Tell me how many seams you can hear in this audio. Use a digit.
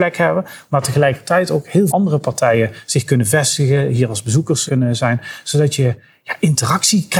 2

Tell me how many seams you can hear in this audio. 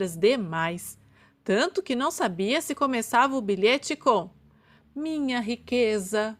0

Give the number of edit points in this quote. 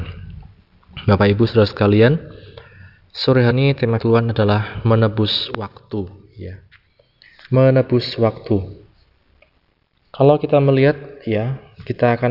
2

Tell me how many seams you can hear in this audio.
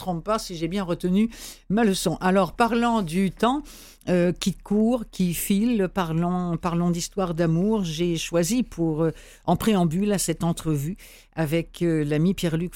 0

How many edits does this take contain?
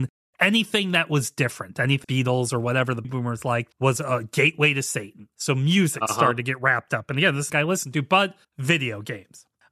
6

